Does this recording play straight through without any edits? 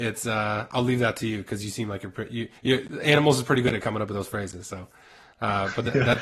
no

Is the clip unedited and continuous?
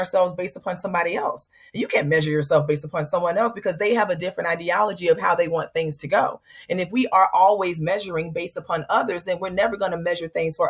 yes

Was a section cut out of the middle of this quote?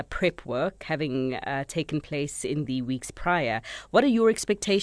no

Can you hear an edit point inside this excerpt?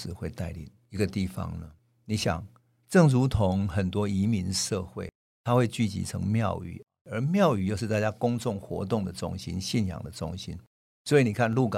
no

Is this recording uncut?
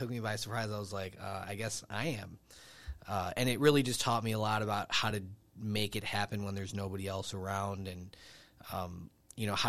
yes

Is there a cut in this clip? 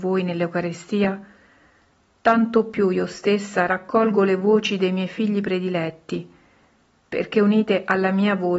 no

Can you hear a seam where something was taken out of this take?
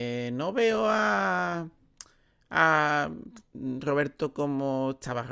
no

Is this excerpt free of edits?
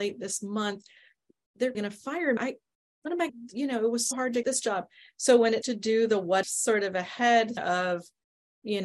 no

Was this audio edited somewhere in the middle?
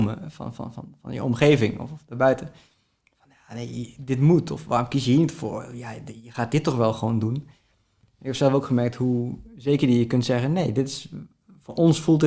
no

